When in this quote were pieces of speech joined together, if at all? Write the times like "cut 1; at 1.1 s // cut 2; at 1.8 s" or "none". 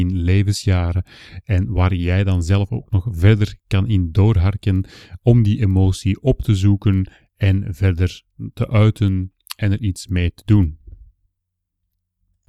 none